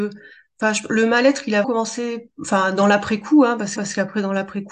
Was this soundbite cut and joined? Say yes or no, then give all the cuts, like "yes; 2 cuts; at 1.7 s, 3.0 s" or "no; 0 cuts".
yes; 2 cuts; at 1.6 s, 3.8 s